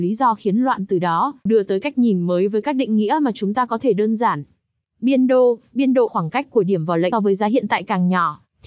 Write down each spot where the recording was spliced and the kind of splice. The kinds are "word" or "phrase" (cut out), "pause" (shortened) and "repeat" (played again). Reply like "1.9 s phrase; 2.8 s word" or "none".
1.5 s word; 6.1 s word; 7.1 s word